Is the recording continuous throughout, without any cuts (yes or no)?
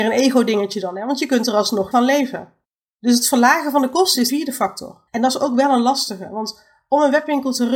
no